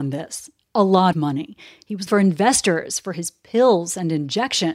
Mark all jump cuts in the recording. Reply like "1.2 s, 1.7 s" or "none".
1.1 s, 2.1 s